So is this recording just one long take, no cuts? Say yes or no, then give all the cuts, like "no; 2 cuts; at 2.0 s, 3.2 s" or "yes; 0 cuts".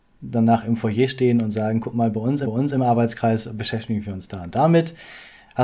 no; 1 cut; at 2.4 s